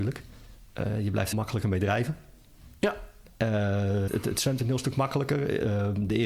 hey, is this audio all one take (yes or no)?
no